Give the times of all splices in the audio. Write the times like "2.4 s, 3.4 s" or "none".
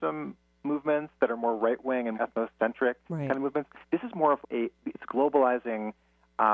2.1 s, 3.8 s, 4.4 s